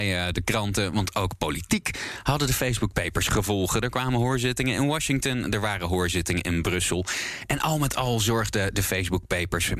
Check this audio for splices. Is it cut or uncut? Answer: uncut